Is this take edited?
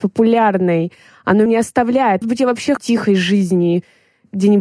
yes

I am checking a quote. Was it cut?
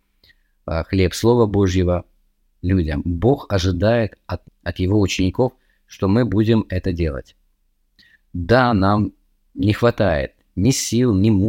yes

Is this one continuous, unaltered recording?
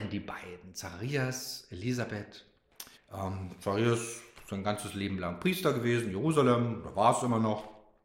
no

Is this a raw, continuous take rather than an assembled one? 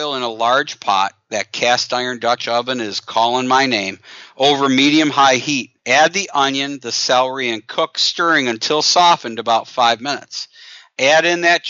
no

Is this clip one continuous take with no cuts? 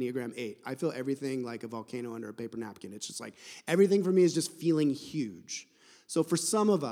yes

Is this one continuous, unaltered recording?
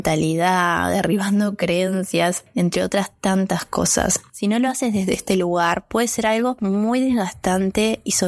yes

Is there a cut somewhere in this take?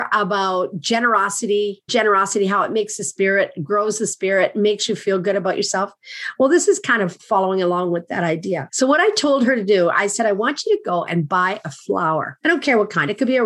yes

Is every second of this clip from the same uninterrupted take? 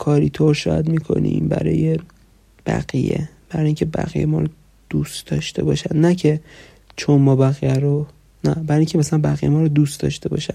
yes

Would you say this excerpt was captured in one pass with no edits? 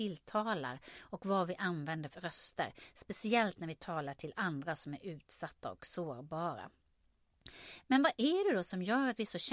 no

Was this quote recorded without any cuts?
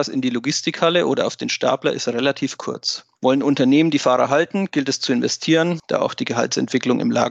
yes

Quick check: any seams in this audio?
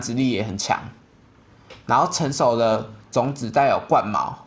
yes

